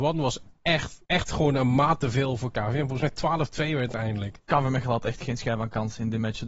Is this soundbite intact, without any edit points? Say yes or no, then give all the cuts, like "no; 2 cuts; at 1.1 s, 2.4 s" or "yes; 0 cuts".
no; 1 cut; at 1.1 s